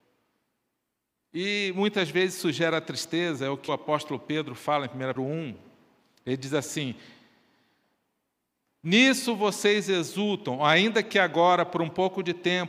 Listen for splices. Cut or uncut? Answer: cut